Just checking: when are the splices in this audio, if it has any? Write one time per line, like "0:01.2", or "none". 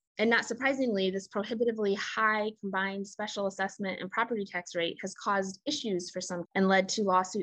0:06.4